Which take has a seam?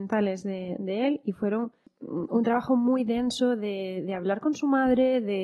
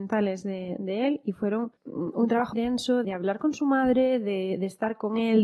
second; 3 cuts; at 1.8 s, 2.5 s, 3.0 s

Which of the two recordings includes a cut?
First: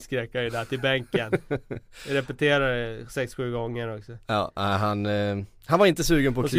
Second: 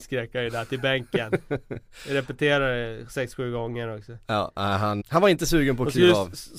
second; 1 cut; at 5.0 s

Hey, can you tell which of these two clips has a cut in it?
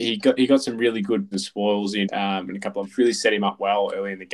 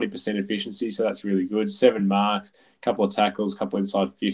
first; 3 cuts; at 1.3 s, 2.0 s, 2.8 s

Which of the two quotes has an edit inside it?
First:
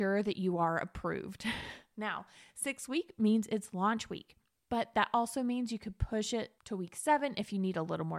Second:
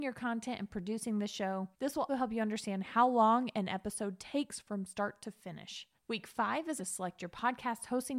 second; 4 cuts; at 1.7 s, 2.1 s, 6.0 s, 6.8 s

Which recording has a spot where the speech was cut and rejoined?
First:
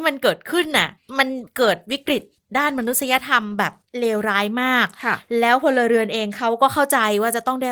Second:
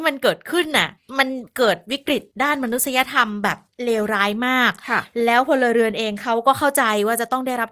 second; 1 cut; at 2.3 s

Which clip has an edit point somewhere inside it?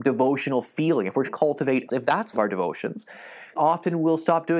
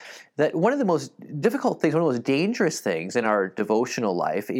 first; 4 cuts; at 1.3 s, 1.9 s, 2.3 s, 3.6 s

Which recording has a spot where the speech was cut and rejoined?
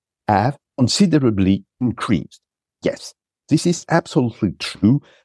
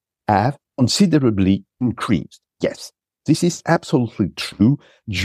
second; 1 cut; at 2.5 s

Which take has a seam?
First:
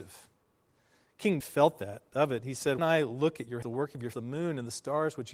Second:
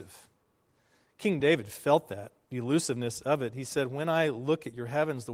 first; 5 cuts; at 1.4 s, 2.1 s, 2.8 s, 3.6 s, 4.1 s

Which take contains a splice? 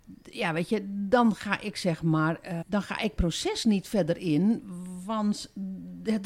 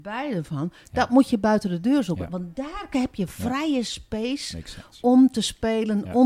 first; 2 cuts; at 2.6 s, 3.2 s

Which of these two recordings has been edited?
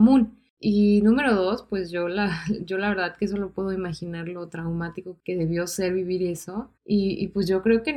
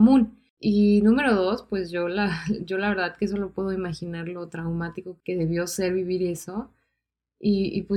first; 1 cut; at 6.8 s

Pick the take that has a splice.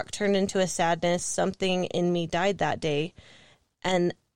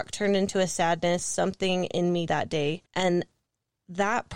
second; 2 cuts; at 2.3 s, 2.9 s

